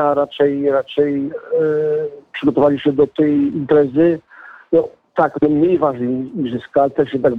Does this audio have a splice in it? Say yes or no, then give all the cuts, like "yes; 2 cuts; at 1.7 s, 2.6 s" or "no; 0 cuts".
no; 0 cuts